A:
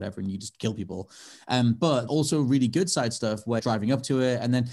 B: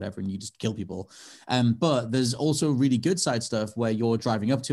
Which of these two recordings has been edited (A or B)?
A